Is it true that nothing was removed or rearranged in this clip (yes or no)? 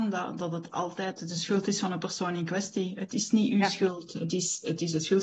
yes